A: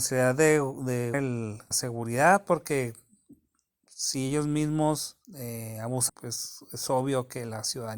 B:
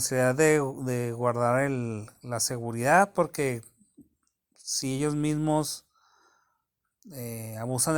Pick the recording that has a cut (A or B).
A